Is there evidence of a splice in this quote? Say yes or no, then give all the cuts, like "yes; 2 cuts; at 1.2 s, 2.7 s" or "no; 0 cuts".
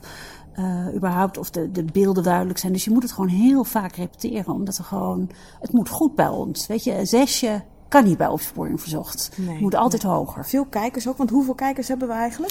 yes; 1 cut; at 2.2 s